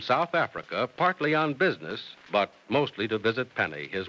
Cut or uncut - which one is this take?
cut